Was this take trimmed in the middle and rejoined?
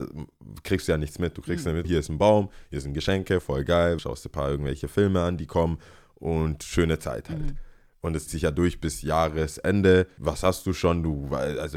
yes; 3 cuts; at 1.8 s, 4.0 s, 8.3 s

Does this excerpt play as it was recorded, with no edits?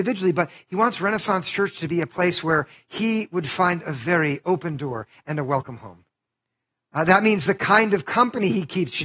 yes; 0 cuts

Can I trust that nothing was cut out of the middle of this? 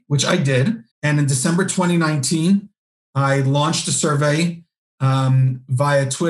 no; 1 cut; at 0.9 s

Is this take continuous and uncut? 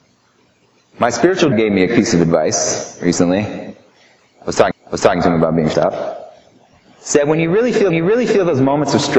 no; 5 cuts; at 1.5 s, 1.9 s, 4.7 s, 5.7 s, 7.9 s

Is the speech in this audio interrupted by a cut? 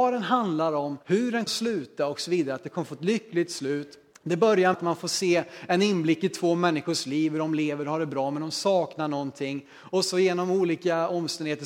yes; 4 cuts; at 1.0 s, 1.5 s, 4.1 s, 4.7 s

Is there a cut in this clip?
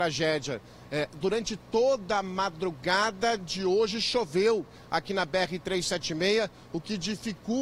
no; 0 cuts

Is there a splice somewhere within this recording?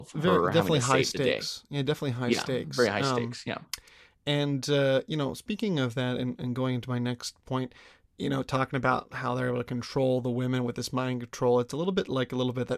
no; 0 cuts

